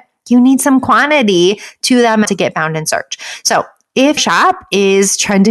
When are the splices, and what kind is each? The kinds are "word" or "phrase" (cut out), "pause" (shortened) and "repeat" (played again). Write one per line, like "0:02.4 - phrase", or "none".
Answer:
0:02.2 - phrase
0:04.2 - word